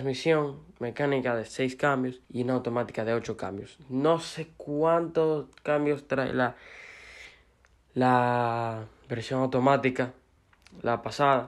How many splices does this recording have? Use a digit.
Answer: 1